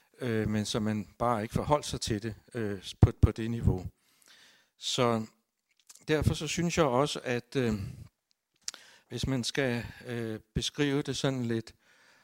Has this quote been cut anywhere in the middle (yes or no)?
no